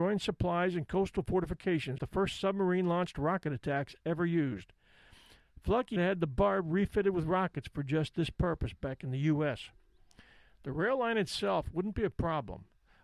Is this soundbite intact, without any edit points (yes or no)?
no